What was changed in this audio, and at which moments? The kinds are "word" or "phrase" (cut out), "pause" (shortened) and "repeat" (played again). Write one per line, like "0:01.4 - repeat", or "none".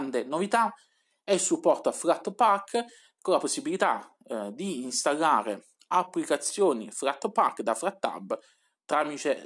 none